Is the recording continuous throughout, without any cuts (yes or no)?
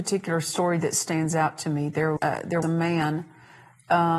no